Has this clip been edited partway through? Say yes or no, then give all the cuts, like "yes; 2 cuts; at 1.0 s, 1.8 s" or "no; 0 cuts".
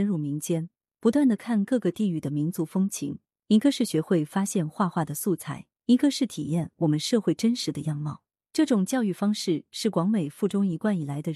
yes; 1 cut; at 5.7 s